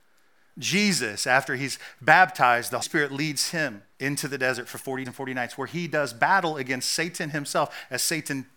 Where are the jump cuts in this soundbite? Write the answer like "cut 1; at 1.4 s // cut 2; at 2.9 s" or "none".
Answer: cut 1; at 2.8 s // cut 2; at 3.9 s // cut 3; at 5.1 s